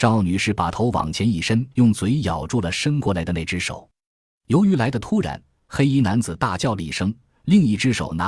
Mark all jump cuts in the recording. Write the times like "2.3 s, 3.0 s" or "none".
1.7 s